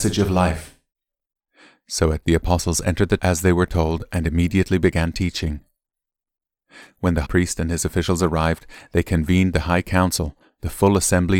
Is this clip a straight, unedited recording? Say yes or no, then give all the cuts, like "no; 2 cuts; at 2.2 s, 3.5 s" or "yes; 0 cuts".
no; 3 cuts; at 2.2 s, 3.2 s, 7.2 s